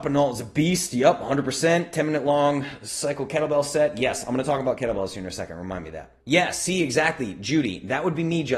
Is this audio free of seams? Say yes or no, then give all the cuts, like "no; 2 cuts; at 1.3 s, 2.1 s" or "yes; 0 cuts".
no; 1 cut; at 6.2 s